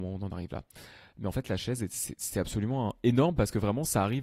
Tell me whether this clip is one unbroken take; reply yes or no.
yes